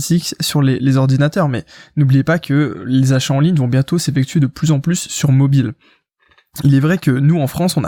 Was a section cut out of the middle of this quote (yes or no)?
no